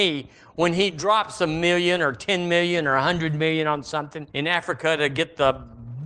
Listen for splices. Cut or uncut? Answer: cut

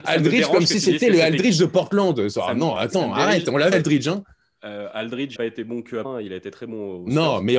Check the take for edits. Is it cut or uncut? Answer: cut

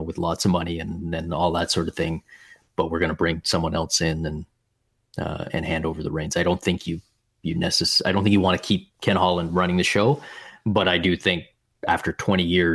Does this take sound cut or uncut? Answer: uncut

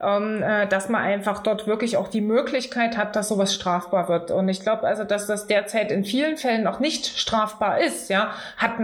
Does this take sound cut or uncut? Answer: uncut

